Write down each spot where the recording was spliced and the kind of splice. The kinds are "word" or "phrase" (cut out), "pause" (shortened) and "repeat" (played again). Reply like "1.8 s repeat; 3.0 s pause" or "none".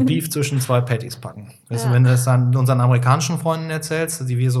none